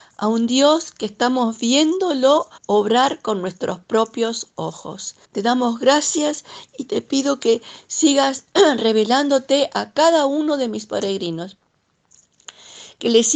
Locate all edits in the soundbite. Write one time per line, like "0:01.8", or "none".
0:02.6
0:05.2